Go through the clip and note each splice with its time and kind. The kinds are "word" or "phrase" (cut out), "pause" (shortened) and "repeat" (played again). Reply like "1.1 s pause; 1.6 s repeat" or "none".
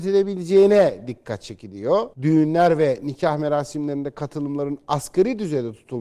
2.1 s pause